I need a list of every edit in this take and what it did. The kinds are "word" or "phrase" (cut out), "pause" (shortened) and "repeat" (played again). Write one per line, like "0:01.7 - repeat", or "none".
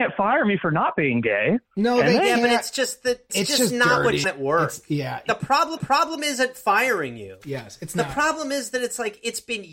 0:01.7 - pause
0:03.3 - phrase
0:04.2 - phrase
0:05.8 - repeat